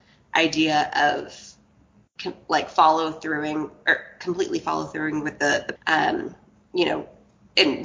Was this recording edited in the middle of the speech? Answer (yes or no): yes